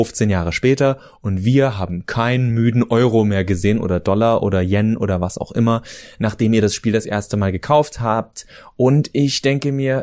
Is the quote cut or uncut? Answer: uncut